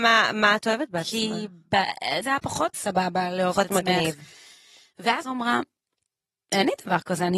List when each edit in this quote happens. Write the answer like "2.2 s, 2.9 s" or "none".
2.2 s, 2.7 s, 5.2 s